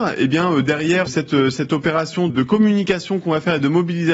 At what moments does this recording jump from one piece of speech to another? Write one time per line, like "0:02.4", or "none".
0:01.1
0:02.3